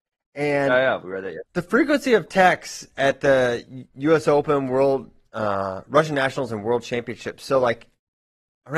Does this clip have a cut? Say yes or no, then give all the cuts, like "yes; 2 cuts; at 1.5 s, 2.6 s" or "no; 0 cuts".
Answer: yes; 2 cuts; at 1.5 s, 3.9 s